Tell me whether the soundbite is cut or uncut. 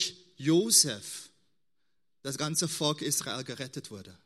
uncut